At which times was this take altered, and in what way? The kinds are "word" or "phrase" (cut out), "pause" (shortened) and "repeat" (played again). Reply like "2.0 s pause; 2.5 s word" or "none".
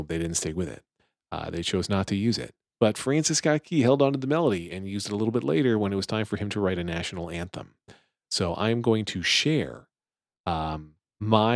none